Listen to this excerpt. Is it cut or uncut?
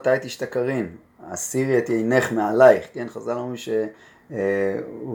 uncut